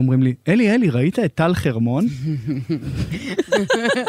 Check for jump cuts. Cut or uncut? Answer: uncut